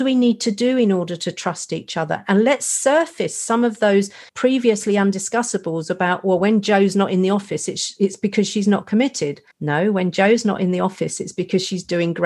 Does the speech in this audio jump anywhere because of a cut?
yes; 2 cuts; at 4.3 s, 9.5 s

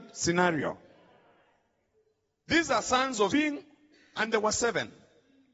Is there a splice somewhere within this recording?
yes; 1 cut; at 3.3 s

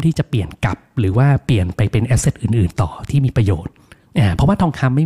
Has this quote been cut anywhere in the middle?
no; 0 cuts

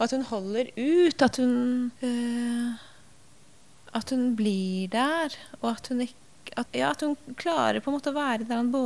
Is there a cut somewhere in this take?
yes; 3 cuts; at 1.3 s, 2.0 s, 6.7 s

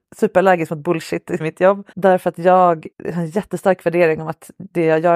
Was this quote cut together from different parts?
yes; 3 cuts; at 1.4 s, 1.9 s, 2.9 s

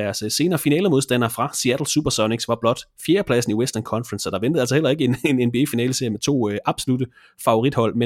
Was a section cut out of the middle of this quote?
no; 0 cuts

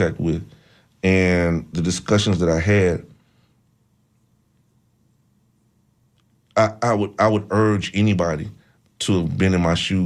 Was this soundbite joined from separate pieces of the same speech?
no; 0 cuts

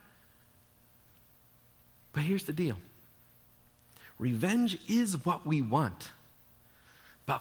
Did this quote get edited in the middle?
no; 0 cuts

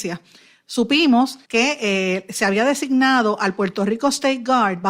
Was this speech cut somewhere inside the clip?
yes; 1 cut; at 1.4 s

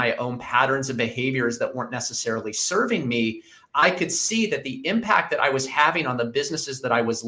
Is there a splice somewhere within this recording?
no; 0 cuts

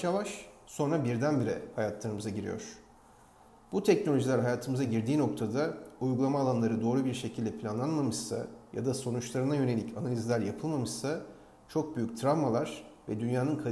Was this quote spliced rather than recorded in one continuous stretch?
no; 0 cuts

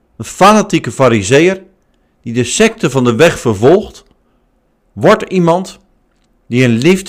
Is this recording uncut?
yes; 0 cuts

